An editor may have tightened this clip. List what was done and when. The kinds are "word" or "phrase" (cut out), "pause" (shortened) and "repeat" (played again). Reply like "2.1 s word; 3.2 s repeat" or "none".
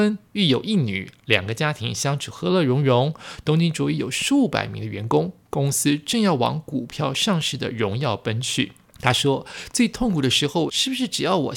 8.8 s pause; 10.7 s phrase